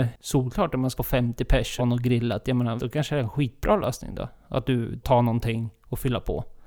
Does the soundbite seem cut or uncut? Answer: cut